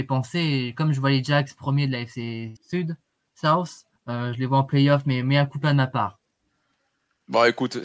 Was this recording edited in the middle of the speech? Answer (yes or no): yes